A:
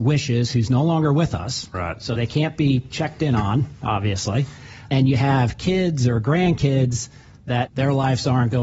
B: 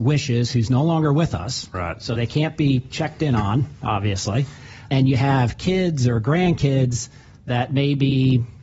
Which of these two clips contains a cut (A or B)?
A